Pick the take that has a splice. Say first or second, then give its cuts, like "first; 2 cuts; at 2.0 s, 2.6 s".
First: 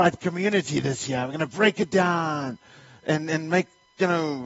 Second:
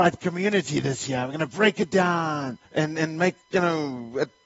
second; 2 cuts; at 2.7 s, 3.4 s